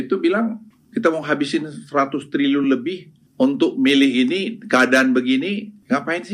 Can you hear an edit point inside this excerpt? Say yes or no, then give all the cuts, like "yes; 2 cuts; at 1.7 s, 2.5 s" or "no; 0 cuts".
no; 0 cuts